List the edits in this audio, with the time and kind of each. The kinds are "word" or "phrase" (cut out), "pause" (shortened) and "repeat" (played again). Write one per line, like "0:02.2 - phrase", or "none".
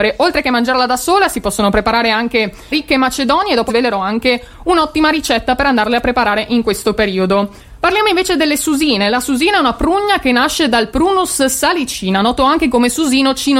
0:02.7 - word
0:03.7 - word